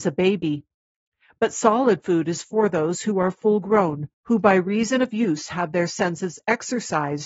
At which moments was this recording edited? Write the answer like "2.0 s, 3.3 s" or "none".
4.1 s